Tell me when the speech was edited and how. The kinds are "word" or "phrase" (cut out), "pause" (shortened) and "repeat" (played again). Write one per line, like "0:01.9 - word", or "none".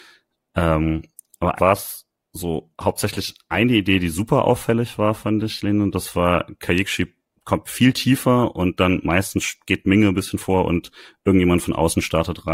0:01.6 - word